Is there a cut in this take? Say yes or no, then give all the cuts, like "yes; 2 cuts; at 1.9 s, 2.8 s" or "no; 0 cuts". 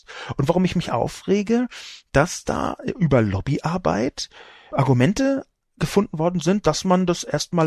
no; 0 cuts